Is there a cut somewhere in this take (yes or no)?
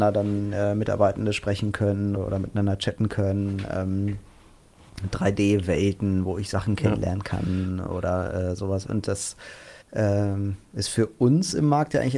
yes